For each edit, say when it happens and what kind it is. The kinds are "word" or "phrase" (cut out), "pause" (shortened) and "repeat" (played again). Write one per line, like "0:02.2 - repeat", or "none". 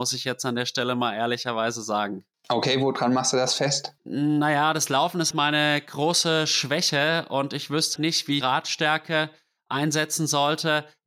0:04.0 - pause
0:05.3 - word
0:08.0 - word
0:08.4 - phrase